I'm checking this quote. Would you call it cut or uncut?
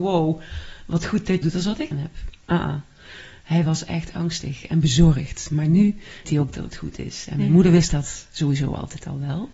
cut